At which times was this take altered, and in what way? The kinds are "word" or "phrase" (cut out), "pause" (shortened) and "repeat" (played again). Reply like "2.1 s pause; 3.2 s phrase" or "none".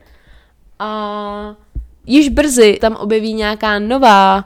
2.0 s word; 2.8 s word